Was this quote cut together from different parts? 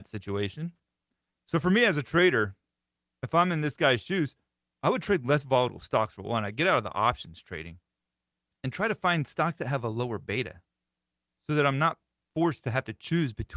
no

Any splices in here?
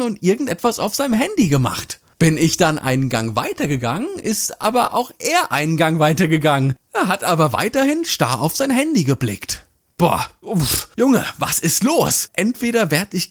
no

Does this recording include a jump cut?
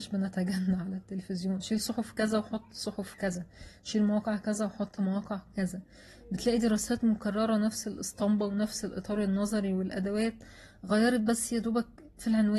no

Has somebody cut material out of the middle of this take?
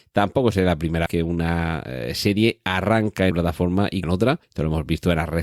yes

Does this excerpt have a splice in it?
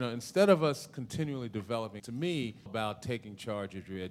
yes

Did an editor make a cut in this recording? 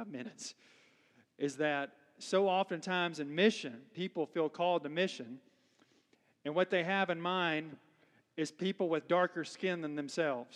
no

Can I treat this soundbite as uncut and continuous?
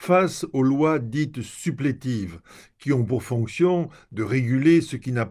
yes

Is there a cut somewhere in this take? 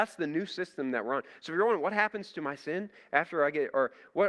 no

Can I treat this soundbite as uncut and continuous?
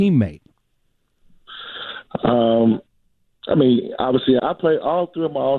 no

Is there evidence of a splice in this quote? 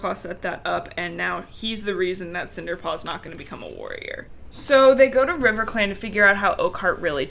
no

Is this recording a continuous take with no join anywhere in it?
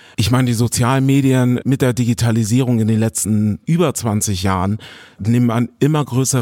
yes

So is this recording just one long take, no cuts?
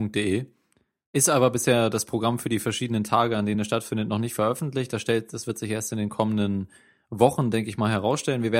yes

